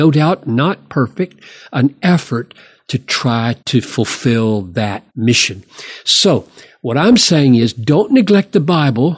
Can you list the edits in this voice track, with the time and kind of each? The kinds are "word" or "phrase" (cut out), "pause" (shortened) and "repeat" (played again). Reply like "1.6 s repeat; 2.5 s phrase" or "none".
3.6 s pause; 5.1 s pause